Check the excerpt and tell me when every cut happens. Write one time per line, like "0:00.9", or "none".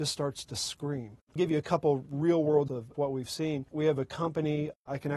0:01.4
0:02.7